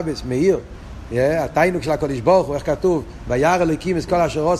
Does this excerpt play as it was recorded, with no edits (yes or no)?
yes